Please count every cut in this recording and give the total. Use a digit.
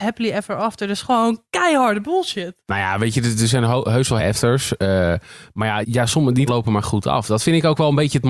5